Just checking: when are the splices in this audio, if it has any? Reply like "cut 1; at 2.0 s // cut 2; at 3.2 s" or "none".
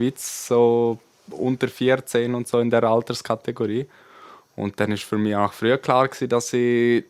none